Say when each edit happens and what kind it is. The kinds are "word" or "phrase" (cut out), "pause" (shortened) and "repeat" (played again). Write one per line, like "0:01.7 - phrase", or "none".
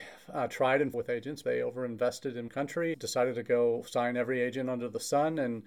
0:00.9 - word
0:01.4 - word
0:02.5 - word
0:02.9 - word